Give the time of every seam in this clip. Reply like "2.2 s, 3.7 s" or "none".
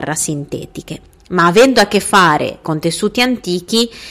2.6 s